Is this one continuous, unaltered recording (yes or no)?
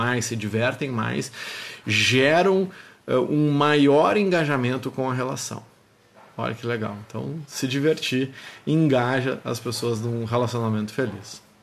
yes